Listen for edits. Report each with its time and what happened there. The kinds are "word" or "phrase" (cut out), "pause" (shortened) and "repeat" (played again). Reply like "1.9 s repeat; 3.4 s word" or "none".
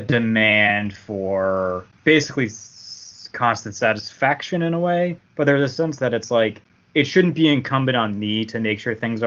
none

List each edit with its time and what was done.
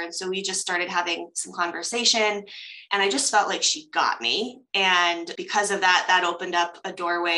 5.3 s word

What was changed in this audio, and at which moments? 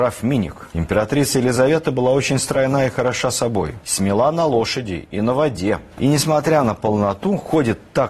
none

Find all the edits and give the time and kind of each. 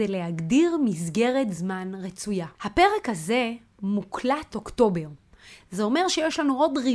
2.5 s pause; 4.5 s word

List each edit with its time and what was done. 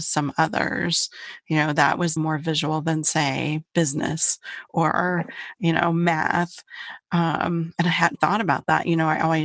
2.2 s word; 8.1 s word

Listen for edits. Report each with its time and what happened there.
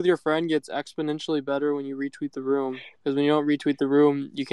3.0 s pause

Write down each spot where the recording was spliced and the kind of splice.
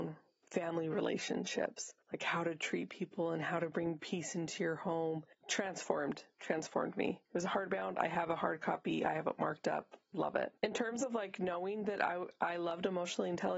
2.0 s pause; 10.6 s pause

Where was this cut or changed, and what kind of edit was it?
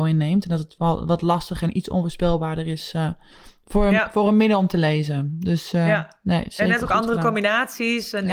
none

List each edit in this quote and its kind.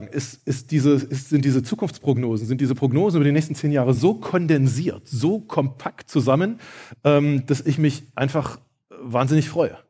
none

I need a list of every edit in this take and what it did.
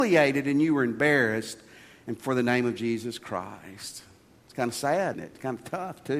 5.1 s word

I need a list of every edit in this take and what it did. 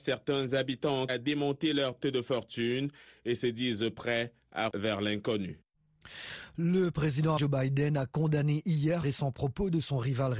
1.1 s word; 2.0 s word; 4.7 s word; 7.4 s word; 9.0 s word

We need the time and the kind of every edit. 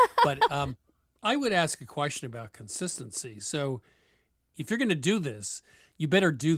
none

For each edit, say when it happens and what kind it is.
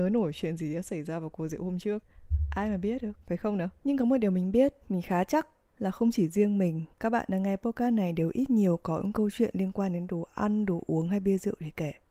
3.2 s pause; 3.8 s pause; 4.8 s pause; 5.6 s pause; 6.9 s pause

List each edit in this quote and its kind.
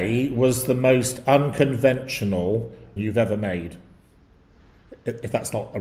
3.0 s phrase

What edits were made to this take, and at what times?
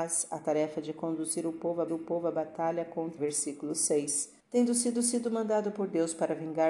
1.9 s repeat; 3.2 s phrase; 4.4 s pause; 4.9 s repeat

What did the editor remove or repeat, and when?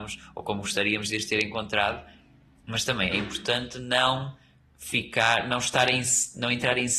none

